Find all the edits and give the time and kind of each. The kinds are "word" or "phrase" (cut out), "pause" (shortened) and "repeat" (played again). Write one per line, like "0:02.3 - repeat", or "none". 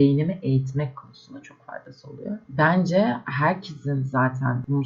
none